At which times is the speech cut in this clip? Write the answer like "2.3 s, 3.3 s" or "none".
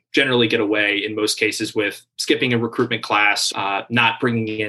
3.5 s

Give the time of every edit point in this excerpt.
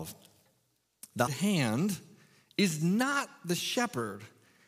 1.3 s

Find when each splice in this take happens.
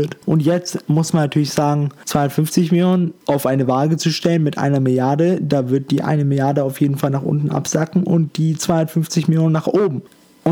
3.2 s

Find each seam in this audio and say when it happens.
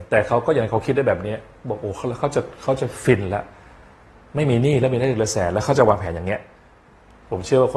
none

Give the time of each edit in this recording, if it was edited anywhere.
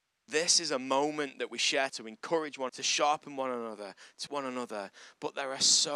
1.9 s, 2.7 s, 4.3 s

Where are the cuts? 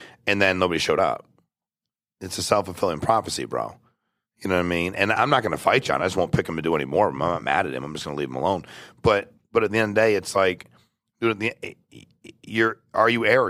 none

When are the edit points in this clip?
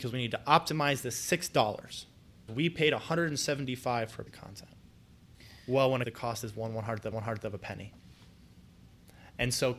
2.5 s, 4.3 s, 6.0 s, 7.1 s

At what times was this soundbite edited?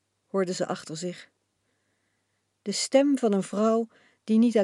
none

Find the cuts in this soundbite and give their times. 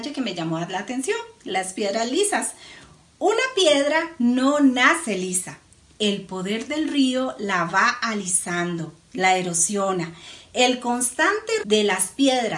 11.6 s

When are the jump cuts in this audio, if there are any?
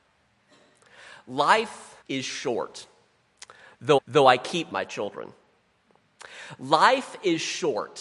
2.0 s, 4.0 s, 4.7 s

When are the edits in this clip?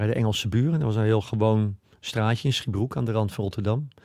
none

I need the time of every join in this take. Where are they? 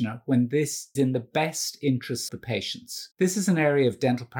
0.9 s, 2.3 s, 3.1 s

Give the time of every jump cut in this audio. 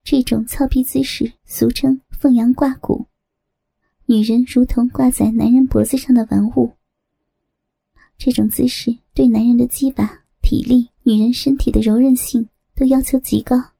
1.4 s, 11.0 s

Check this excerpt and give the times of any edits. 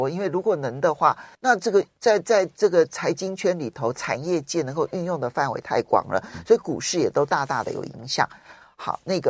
1.3 s

